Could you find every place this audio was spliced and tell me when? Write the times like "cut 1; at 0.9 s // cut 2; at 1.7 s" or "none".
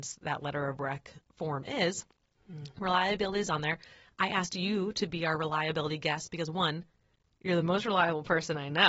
none